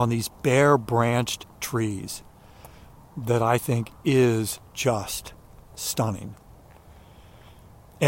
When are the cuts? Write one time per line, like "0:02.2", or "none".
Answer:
none